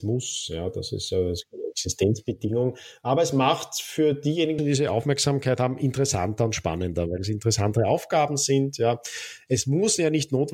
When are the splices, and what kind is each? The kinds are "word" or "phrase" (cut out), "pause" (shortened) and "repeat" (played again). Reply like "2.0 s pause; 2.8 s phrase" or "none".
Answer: 4.6 s word